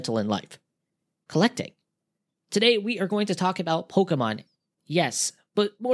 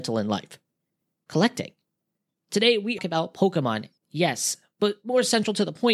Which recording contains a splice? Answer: second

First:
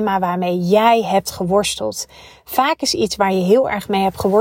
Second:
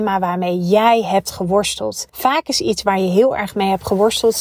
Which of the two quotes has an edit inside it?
second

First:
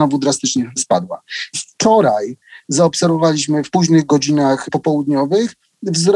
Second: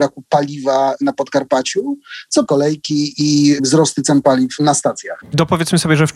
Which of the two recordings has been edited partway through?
second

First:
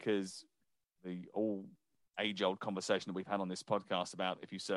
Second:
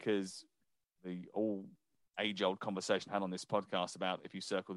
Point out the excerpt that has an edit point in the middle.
second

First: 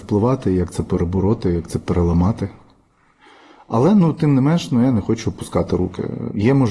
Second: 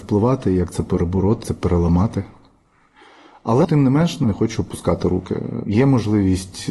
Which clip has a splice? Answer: second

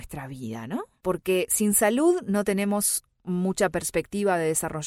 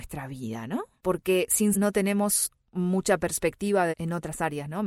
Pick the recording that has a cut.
second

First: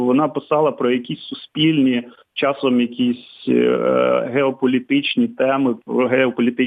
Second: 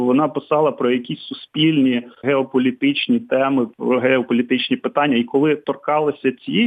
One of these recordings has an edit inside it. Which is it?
second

